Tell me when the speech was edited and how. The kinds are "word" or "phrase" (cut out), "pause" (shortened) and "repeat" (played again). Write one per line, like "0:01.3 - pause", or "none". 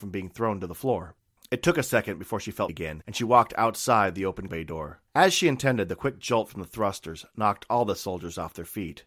0:01.3 - pause
0:02.7 - word
0:04.5 - word
0:05.1 - pause